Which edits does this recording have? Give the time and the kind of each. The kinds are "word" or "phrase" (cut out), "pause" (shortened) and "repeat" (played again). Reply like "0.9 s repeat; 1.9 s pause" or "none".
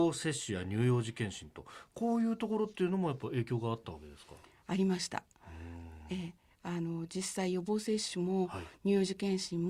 none